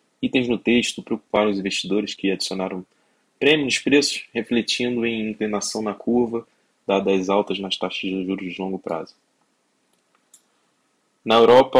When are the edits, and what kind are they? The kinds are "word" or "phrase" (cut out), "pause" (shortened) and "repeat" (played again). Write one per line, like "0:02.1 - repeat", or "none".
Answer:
none